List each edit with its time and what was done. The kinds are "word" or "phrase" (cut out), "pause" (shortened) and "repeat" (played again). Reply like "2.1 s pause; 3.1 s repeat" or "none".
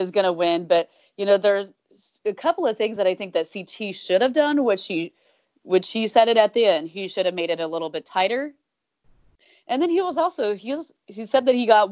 none